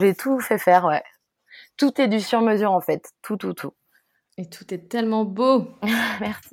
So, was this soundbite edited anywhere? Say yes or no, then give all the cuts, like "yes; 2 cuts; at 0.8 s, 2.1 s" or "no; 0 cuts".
no; 0 cuts